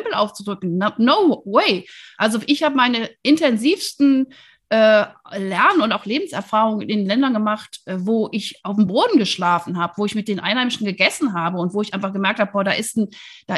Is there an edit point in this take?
no; 0 cuts

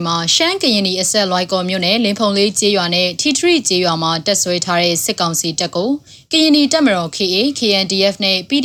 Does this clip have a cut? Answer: no; 0 cuts

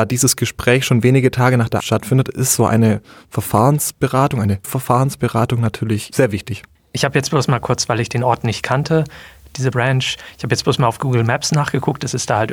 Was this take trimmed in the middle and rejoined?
yes; 3 cuts; at 1.8 s, 4.6 s, 9.7 s

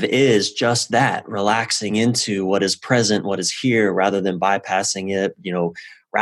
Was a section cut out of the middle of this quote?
no; 0 cuts

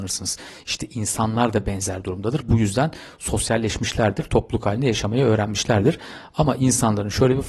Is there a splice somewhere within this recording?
no; 0 cuts

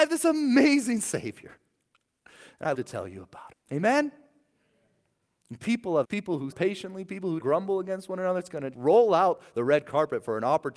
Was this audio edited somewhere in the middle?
yes; 6 cuts; at 2.7 s, 3.5 s, 6.0 s, 6.5 s, 7.4 s, 8.7 s

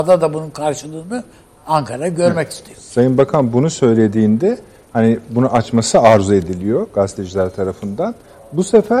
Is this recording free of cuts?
yes; 0 cuts

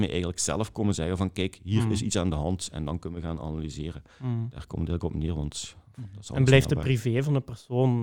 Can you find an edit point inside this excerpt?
no; 0 cuts

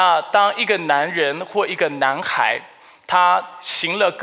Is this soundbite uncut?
yes; 0 cuts

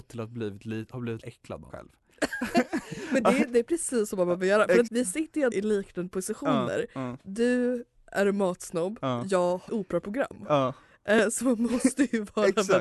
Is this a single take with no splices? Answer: no; 5 cuts; at 1.2 s, 1.7 s, 4.9 s, 5.5 s, 9.7 s

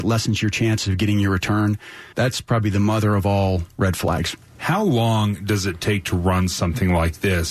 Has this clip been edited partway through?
yes; 1 cut; at 2.1 s

